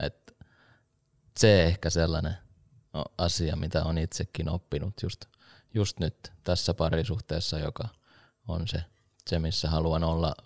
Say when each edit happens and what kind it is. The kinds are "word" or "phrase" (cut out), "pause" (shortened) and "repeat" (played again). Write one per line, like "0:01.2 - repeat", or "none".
none